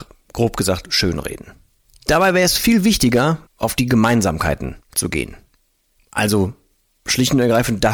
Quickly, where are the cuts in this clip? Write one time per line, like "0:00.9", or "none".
0:01.8
0:03.5
0:04.8